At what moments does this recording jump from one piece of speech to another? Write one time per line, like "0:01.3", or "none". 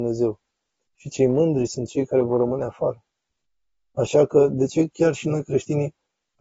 none